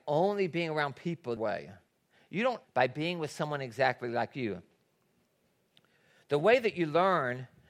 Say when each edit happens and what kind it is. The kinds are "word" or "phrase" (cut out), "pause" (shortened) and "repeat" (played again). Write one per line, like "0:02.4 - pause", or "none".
0:01.4 - phrase
0:02.6 - phrase